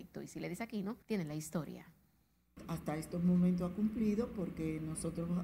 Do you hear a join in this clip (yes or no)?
yes